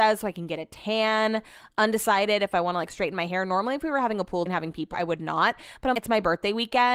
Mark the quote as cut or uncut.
cut